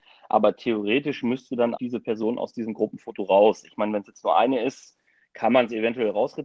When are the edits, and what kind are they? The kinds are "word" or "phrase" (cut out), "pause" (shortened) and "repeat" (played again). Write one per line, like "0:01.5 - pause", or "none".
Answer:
0:01.8 - word